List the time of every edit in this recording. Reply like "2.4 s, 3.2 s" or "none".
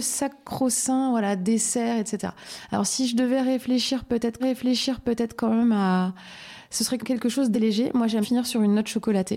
4.4 s, 7.0 s, 7.5 s, 8.2 s